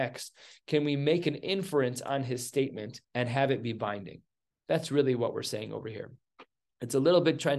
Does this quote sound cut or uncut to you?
cut